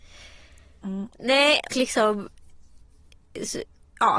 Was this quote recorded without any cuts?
no; 1 cut; at 1.7 s

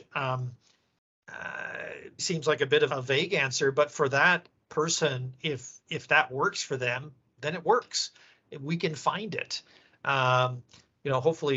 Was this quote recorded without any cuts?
no; 2 cuts; at 2.2 s, 2.9 s

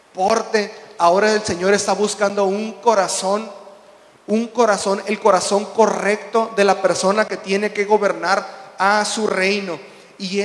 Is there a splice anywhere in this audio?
no; 0 cuts

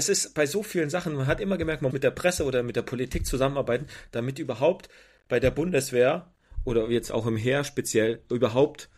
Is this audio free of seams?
no; 1 cut; at 1.9 s

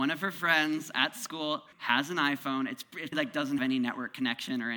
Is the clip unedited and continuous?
no; 3 cuts; at 1.7 s, 3.1 s, 3.6 s

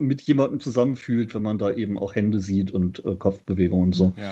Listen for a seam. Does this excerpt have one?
no; 0 cuts

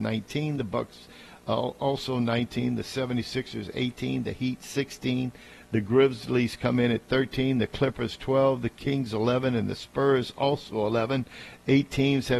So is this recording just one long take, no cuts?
yes; 0 cuts

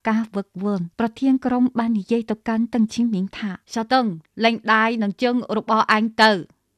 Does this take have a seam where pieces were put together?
yes; 2 cuts; at 0.9 s, 3.6 s

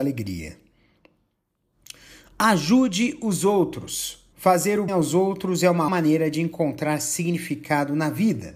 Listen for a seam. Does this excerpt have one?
yes; 3 cuts; at 4.3 s, 4.9 s, 5.9 s

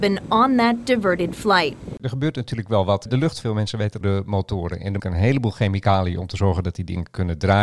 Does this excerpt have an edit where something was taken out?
yes; 3 cuts; at 3.4 s, 4.0 s, 5.0 s

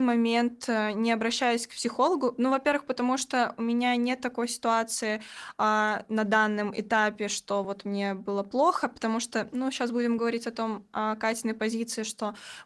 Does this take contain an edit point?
no; 0 cuts

